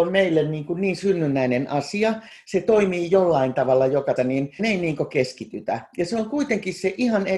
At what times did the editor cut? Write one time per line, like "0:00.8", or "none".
0:04.2
0:04.6